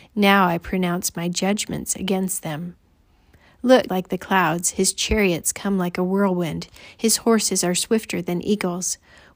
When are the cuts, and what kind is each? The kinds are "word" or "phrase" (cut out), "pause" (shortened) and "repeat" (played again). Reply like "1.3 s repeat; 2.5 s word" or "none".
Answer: 3.9 s phrase